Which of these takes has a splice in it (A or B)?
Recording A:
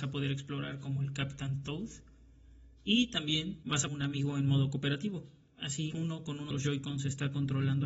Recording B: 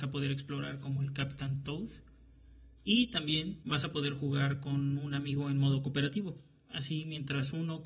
A